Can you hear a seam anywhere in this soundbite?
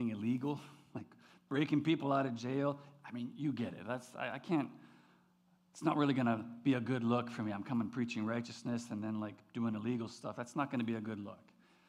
no; 0 cuts

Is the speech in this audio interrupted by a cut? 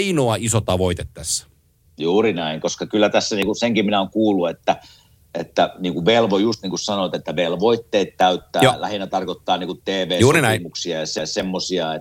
no; 0 cuts

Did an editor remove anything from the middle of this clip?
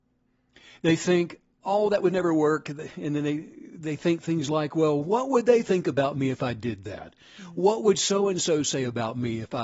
no; 0 cuts

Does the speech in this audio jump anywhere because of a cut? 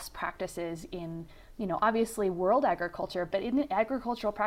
yes; 1 cut; at 3.3 s

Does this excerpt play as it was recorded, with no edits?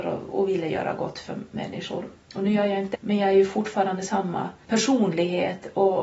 no; 1 cut; at 2.9 s

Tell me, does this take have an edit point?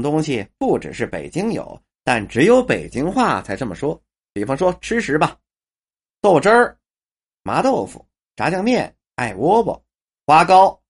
no; 0 cuts

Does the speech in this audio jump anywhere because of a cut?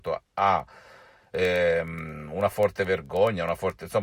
no; 0 cuts

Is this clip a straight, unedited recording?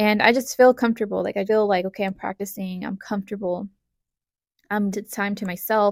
no; 2 cuts; at 1.4 s, 4.9 s

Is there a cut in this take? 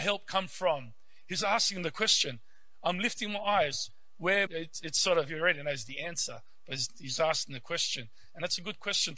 yes; 1 cut; at 4.5 s

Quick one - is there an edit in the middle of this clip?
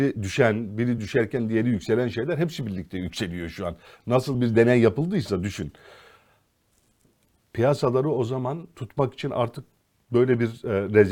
no; 0 cuts

